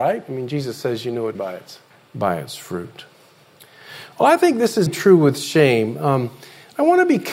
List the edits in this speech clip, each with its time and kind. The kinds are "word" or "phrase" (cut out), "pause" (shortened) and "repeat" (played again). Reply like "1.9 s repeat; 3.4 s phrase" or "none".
1.3 s word; 1.9 s pause; 4.9 s word